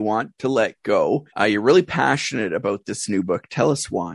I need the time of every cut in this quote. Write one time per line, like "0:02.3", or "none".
0:01.3